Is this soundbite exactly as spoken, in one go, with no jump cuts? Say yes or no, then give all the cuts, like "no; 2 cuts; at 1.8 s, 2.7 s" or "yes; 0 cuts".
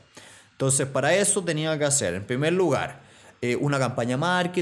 yes; 0 cuts